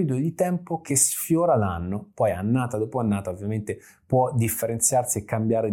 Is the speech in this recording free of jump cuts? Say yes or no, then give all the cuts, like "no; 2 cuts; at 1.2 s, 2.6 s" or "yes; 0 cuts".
yes; 0 cuts